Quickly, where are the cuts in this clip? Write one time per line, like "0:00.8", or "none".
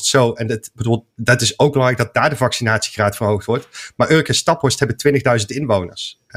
none